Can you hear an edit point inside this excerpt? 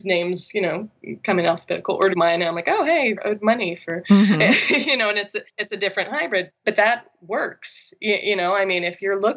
yes; 4 cuts; at 2.1 s, 3.2 s, 5.5 s, 6.5 s

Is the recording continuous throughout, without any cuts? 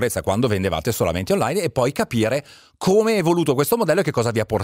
yes; 0 cuts

